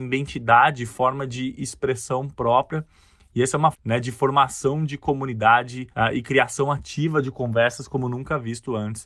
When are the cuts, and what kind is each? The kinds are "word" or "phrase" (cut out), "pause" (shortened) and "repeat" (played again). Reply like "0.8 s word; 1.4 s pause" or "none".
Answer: 3.7 s word; 5.9 s pause